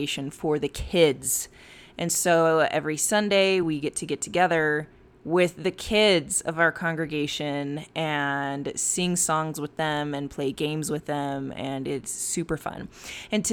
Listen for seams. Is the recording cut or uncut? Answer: uncut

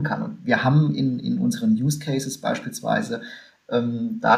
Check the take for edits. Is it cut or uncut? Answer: uncut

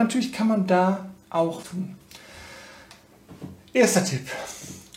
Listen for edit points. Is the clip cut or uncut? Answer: cut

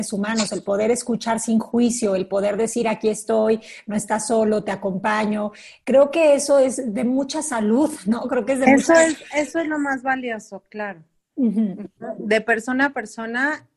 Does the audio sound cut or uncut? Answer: uncut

